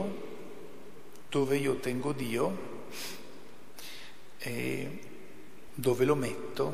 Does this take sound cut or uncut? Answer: uncut